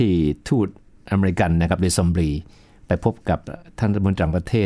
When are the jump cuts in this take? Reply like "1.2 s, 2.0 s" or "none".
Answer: none